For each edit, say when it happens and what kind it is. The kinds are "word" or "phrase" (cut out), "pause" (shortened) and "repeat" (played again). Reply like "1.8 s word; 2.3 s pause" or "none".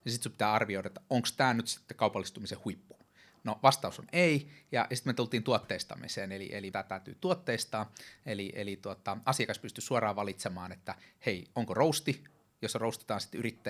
6.7 s phrase